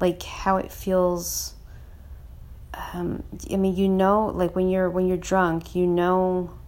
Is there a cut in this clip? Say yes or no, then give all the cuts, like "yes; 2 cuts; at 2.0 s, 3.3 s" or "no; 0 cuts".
no; 0 cuts